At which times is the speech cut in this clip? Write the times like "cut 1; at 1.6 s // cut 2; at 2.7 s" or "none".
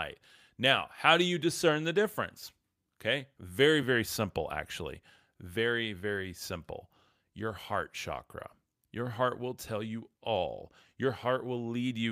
none